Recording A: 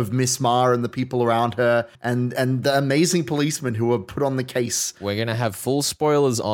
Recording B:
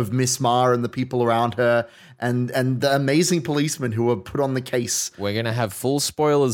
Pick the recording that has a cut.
A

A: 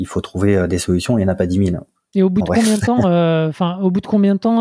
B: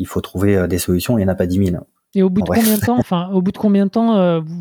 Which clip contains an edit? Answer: B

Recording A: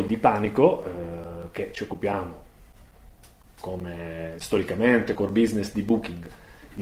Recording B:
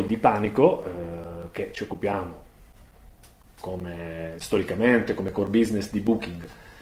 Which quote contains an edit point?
A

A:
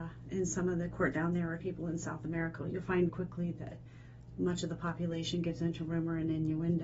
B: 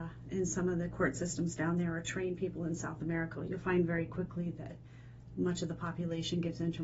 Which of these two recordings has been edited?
A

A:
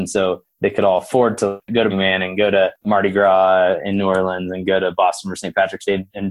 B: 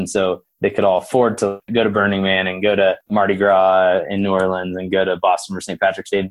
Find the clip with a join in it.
A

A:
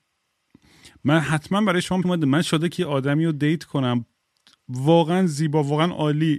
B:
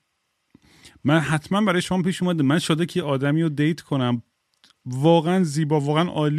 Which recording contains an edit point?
A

